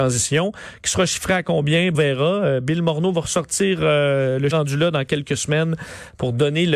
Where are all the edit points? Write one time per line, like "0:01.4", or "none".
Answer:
0:01.9
0:04.5